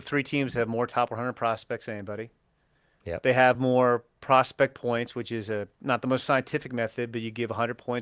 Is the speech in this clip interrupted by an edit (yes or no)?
no